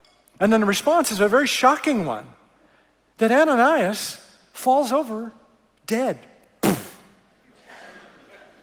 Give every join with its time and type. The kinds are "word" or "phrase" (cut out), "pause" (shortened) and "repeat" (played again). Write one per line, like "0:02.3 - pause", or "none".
none